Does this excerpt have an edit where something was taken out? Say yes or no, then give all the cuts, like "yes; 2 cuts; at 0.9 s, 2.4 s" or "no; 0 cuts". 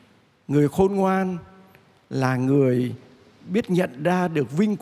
no; 0 cuts